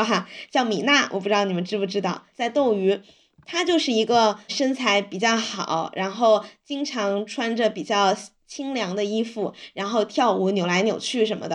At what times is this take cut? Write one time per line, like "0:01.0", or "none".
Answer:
none